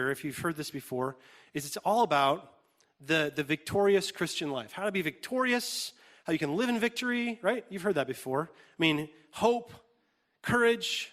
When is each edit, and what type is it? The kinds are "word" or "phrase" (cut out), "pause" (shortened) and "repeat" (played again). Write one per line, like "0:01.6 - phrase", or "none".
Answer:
none